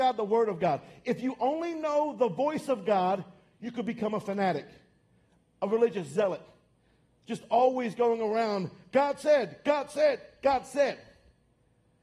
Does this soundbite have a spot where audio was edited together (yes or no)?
no